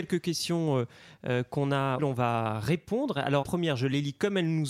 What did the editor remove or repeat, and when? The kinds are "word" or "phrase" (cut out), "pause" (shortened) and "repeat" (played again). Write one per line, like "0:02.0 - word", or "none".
0:02.0 - word
0:03.4 - word